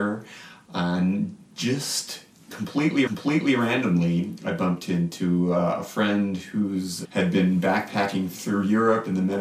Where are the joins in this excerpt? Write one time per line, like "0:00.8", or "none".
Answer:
0:03.1
0:07.0